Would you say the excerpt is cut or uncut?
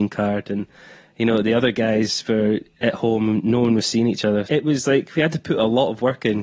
cut